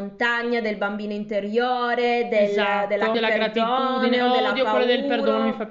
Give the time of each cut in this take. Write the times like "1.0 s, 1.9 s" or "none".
3.1 s

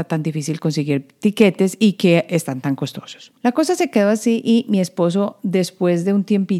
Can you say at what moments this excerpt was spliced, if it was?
3.4 s

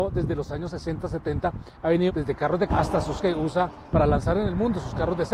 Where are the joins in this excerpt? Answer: 2.1 s, 2.7 s, 3.2 s, 3.9 s

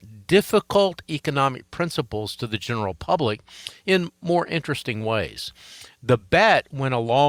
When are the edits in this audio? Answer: none

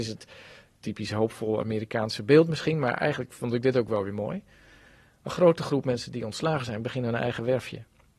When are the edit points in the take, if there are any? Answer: none

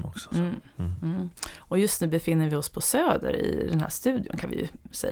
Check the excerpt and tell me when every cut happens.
none

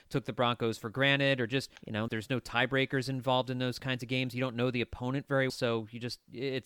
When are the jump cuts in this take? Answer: 1.8 s, 2.1 s, 5.5 s

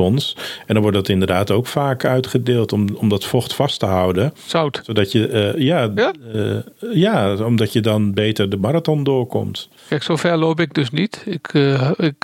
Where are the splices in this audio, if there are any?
9.8 s

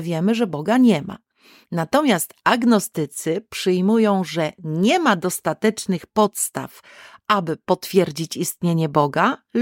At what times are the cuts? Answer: none

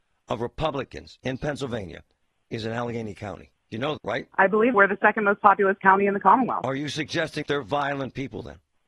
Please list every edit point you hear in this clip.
4.0 s, 4.7 s, 7.4 s

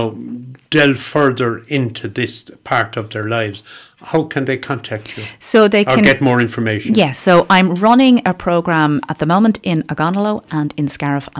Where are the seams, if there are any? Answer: none

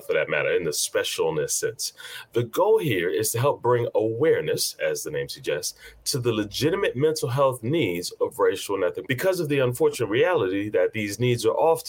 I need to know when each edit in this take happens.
9.0 s

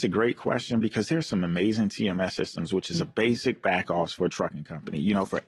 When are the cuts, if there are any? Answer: none

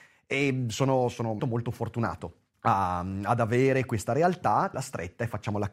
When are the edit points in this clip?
1.4 s, 2.5 s, 4.7 s

